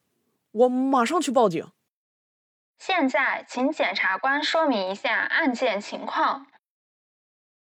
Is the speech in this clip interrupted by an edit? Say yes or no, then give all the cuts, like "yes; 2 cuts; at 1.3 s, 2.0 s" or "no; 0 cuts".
no; 0 cuts